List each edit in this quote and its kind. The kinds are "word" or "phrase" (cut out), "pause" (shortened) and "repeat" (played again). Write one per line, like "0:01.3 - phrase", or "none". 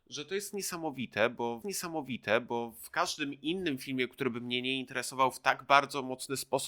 0:01.6 - repeat